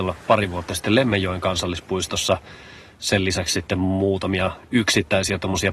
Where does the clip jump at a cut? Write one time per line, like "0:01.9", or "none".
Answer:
none